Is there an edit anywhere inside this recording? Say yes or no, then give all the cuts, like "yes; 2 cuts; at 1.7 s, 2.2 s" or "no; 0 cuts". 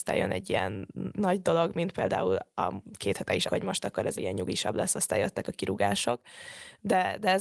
yes; 3 cuts; at 1.1 s, 3.5 s, 4.2 s